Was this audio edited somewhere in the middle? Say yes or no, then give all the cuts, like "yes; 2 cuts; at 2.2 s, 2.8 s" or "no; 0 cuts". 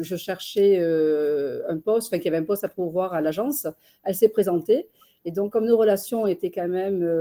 no; 0 cuts